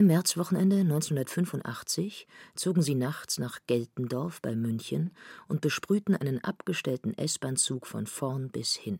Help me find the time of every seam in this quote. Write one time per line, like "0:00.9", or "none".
none